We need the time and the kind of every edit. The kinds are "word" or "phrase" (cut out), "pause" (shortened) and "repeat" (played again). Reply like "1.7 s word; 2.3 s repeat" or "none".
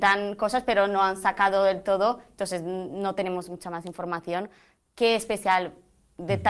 none